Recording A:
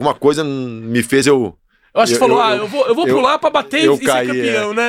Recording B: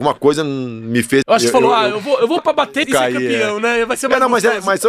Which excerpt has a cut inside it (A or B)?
B